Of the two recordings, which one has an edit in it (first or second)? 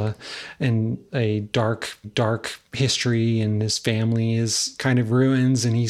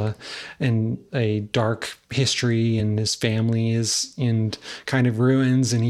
first